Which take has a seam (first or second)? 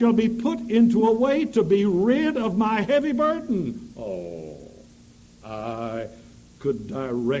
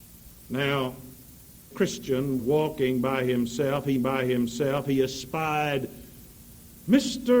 second